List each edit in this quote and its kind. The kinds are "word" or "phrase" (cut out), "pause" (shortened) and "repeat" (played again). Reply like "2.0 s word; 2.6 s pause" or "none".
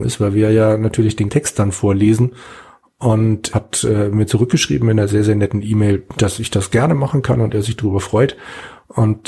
1.3 s word; 3.5 s word